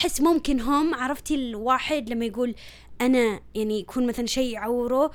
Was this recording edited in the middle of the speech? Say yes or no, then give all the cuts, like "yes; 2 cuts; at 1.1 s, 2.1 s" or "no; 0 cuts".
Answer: no; 0 cuts